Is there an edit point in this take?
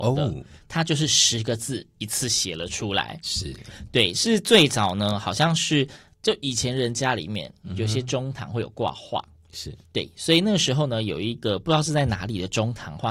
no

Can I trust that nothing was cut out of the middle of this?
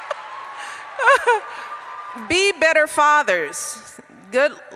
no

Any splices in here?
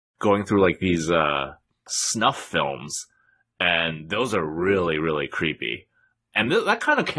no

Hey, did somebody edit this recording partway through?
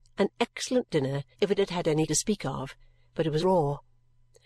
yes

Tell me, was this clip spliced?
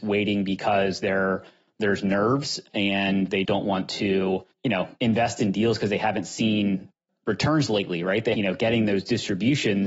yes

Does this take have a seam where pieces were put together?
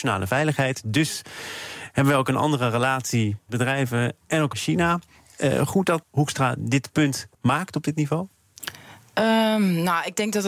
yes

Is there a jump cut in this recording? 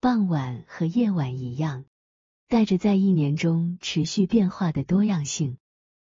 no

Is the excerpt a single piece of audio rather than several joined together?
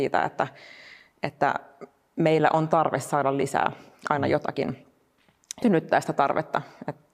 no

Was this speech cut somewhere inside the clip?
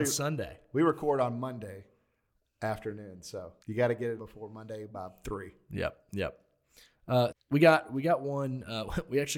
yes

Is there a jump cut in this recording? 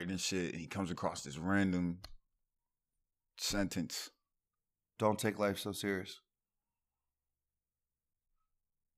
no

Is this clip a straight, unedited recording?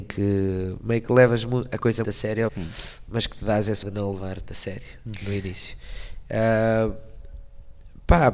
no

